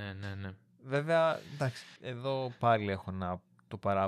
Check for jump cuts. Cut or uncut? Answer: cut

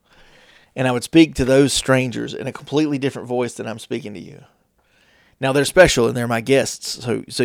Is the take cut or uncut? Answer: uncut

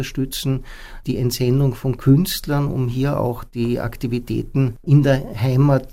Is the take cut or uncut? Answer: uncut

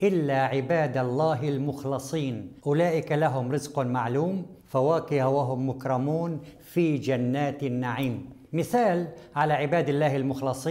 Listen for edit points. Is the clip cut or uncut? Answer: cut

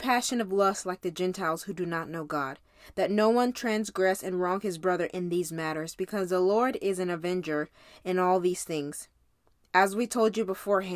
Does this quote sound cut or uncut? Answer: uncut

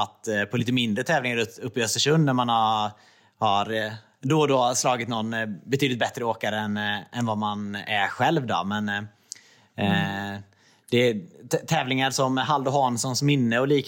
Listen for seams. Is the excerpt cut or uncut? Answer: uncut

